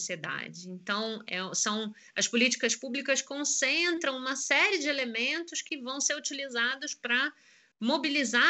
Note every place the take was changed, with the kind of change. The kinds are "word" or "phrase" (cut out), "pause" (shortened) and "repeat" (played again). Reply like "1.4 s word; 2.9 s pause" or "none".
none